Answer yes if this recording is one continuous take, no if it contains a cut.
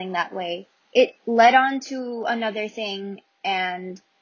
yes